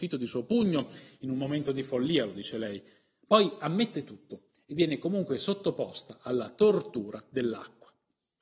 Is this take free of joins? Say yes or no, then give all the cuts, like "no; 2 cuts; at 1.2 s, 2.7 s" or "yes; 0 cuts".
yes; 0 cuts